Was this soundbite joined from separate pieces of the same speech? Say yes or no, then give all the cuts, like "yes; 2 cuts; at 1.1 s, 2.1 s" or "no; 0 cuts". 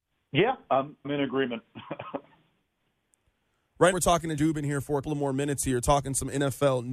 yes; 4 cuts; at 1.0 s, 3.9 s, 4.4 s, 5.0 s